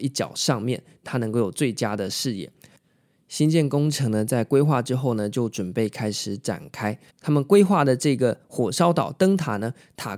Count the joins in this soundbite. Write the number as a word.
one